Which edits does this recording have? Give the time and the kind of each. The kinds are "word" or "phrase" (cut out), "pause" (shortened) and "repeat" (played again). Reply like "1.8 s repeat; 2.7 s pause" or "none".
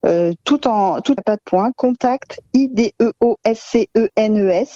1.2 s phrase